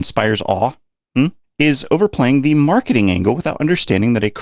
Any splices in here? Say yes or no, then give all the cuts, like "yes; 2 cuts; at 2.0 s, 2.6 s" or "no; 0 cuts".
yes; 1 cut; at 1.4 s